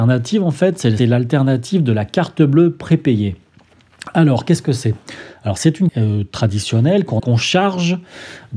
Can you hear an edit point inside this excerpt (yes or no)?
yes